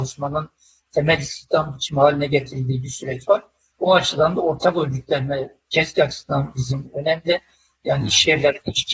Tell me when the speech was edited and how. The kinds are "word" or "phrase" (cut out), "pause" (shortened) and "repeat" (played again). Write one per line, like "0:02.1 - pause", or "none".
none